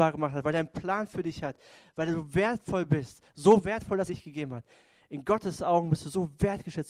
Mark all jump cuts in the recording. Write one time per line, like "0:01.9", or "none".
0:04.1

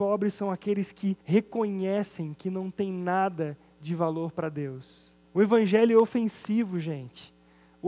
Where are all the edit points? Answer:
0:01.2
0:05.2

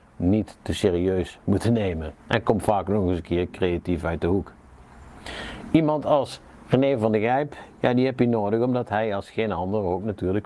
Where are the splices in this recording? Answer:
0:02.2

